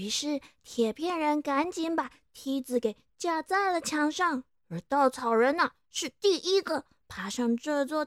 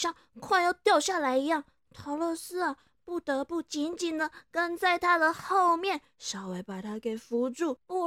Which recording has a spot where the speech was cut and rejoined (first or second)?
first